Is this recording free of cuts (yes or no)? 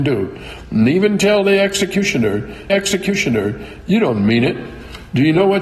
no